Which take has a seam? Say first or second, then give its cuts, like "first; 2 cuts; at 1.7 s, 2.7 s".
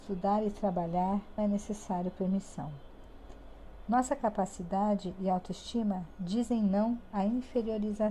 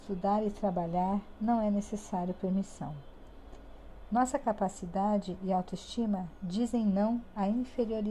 first; 1 cut; at 1.4 s